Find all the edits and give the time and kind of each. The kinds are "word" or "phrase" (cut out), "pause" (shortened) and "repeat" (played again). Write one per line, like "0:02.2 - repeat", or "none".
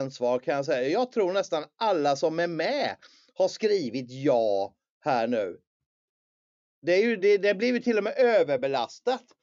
none